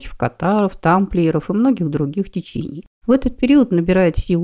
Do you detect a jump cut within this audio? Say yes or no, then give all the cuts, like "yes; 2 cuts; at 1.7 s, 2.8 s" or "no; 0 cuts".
no; 0 cuts